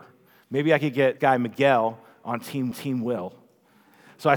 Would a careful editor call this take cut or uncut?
cut